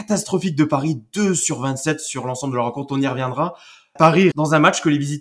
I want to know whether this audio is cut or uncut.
cut